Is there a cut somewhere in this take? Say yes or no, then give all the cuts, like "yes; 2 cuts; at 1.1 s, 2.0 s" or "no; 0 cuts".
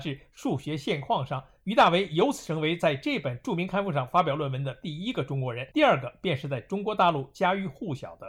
yes; 1 cut; at 5.7 s